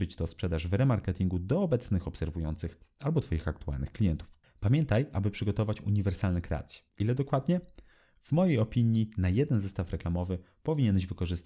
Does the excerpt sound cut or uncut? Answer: cut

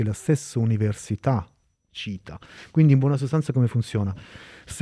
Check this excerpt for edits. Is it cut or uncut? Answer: uncut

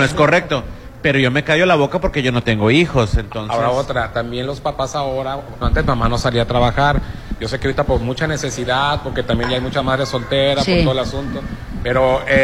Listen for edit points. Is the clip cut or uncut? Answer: cut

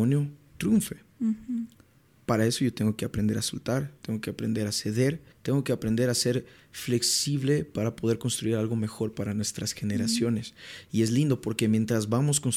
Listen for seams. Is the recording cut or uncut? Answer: cut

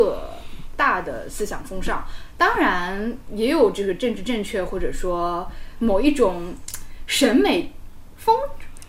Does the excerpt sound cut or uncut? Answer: uncut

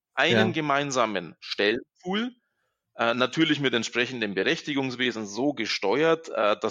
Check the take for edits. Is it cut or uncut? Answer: uncut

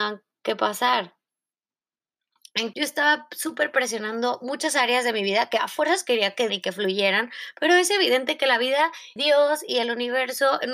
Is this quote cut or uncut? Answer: cut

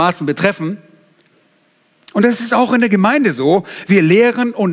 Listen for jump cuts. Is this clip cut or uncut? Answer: uncut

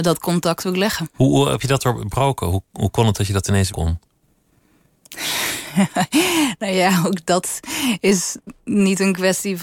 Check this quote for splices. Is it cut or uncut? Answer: cut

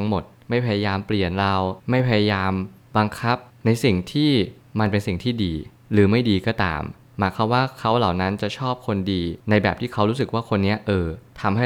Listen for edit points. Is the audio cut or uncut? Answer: cut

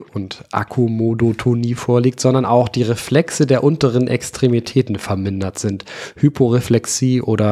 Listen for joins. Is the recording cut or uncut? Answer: uncut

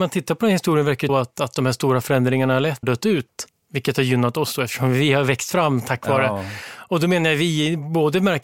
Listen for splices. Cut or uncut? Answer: cut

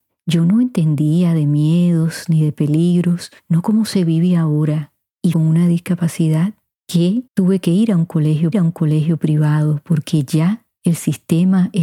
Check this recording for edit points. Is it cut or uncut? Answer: cut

